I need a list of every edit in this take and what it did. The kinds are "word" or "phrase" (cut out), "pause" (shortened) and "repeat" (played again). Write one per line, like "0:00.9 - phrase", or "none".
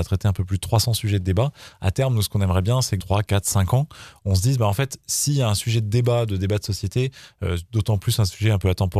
0:03.0 - word